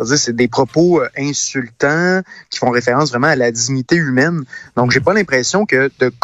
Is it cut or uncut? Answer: uncut